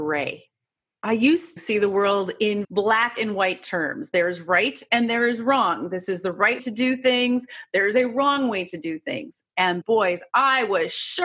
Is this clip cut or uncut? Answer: cut